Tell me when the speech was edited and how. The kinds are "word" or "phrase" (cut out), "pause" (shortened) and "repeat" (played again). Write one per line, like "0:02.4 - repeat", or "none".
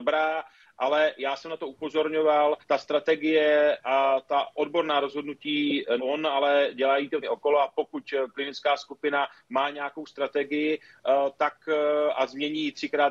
0:02.6 - pause
0:06.0 - word
0:07.2 - phrase